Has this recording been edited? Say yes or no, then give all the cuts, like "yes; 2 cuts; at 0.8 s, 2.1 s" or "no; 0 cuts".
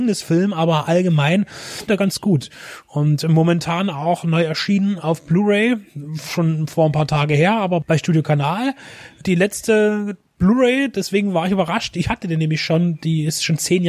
yes; 1 cut; at 1.9 s